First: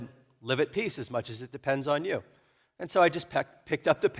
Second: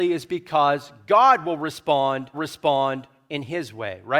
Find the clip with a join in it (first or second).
second